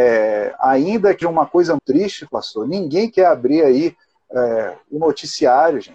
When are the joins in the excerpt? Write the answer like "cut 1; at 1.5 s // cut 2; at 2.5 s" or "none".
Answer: cut 1; at 1.2 s // cut 2; at 1.8 s